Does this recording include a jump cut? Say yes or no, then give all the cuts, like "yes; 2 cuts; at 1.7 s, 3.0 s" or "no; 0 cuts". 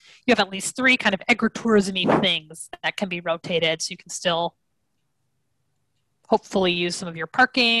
no; 0 cuts